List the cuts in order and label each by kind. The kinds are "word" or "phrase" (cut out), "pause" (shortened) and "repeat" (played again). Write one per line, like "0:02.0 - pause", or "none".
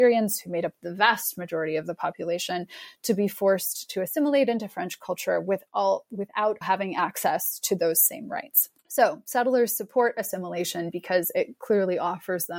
0:06.6 - word
0:08.8 - pause